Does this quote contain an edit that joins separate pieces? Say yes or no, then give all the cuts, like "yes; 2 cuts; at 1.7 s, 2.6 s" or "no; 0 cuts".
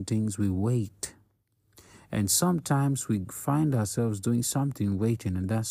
no; 0 cuts